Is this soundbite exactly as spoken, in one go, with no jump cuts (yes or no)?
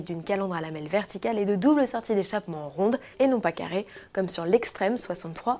no